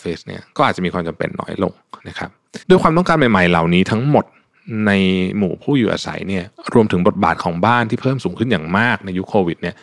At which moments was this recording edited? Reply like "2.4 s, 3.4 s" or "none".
2.0 s, 2.6 s

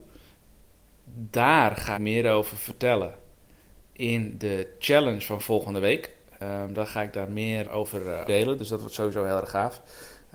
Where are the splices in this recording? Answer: 1.9 s, 7.6 s, 8.3 s

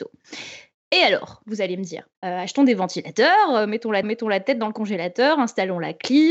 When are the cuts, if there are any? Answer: 2.1 s, 4.0 s

